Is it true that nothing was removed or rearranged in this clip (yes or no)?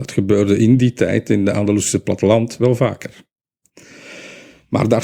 yes